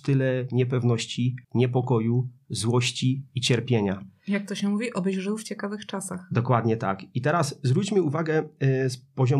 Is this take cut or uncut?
cut